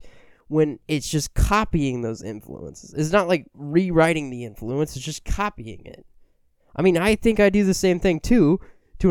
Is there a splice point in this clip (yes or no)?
no